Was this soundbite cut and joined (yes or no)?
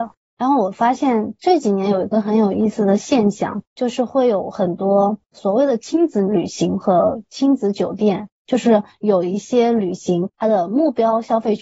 yes